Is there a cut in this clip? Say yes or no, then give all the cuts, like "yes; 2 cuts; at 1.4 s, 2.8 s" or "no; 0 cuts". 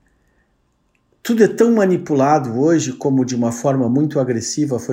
no; 0 cuts